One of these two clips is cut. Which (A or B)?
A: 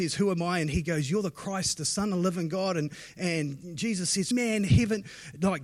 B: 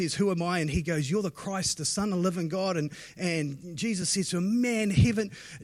A